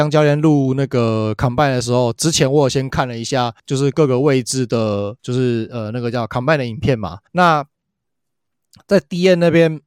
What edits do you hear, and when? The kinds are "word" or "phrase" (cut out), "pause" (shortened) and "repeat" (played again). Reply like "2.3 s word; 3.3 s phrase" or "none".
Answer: 3.6 s pause; 5.2 s pause; 7.3 s pause